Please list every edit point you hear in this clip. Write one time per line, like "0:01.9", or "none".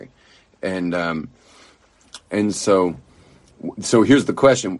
none